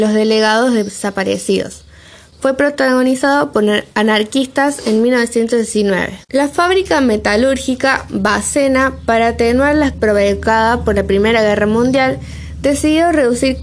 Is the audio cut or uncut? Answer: cut